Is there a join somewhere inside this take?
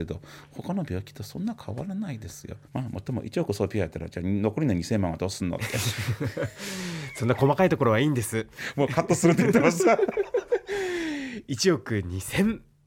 yes; 1 cut; at 2.6 s

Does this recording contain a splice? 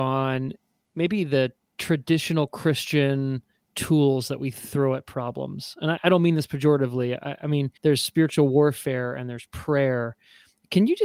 yes; 1 cut; at 7.8 s

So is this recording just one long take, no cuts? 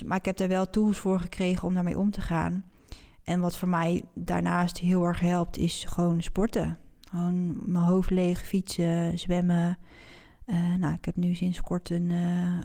yes; 0 cuts

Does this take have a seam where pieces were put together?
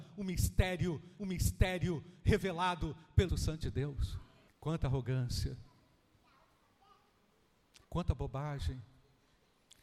yes; 4 cuts; at 1.2 s, 3.3 s, 4.5 s, 7.8 s

